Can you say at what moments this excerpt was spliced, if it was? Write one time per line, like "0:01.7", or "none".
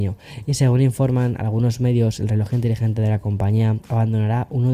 none